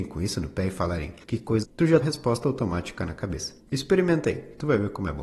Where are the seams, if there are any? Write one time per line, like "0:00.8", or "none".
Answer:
0:01.2
0:01.6
0:02.0
0:03.6